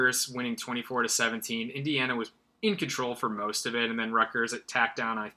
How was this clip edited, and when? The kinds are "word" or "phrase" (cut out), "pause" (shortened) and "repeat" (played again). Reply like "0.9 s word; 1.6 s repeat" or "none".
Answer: none